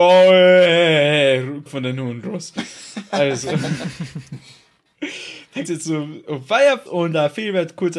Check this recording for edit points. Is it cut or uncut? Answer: cut